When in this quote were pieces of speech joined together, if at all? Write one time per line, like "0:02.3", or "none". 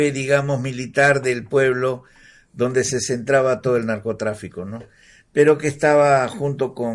none